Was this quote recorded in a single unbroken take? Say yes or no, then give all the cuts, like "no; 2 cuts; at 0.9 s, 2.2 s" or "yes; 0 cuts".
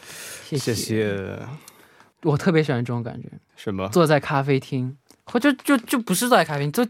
yes; 0 cuts